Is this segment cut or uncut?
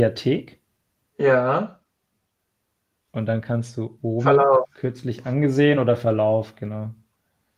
uncut